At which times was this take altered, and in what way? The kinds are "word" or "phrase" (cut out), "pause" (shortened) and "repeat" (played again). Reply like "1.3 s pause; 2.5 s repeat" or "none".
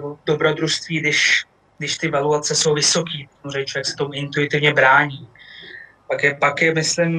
3.3 s pause